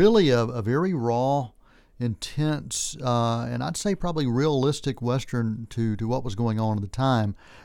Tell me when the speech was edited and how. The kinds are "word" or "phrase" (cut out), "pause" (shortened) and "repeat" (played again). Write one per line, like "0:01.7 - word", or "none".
none